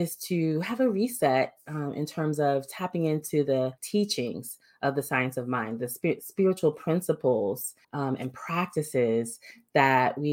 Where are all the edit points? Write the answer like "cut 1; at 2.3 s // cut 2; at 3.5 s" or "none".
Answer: cut 1; at 3.8 s // cut 2; at 7.8 s